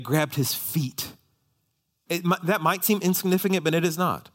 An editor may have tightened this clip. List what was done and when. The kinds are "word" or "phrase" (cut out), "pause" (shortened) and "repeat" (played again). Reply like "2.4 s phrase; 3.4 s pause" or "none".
none